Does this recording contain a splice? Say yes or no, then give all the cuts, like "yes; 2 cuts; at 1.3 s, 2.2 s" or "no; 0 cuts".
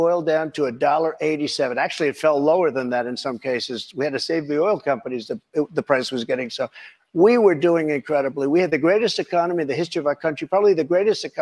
no; 0 cuts